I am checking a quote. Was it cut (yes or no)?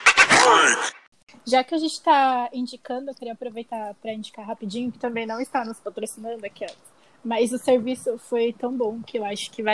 no